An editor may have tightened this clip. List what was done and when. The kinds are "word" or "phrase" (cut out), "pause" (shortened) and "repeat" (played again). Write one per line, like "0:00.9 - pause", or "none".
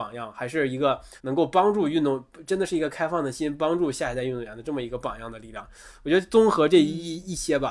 0:01.2 - pause